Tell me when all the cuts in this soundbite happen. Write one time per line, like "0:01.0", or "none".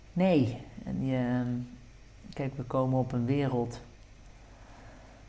none